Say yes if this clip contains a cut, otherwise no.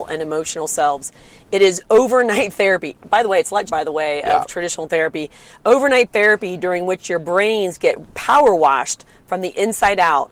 yes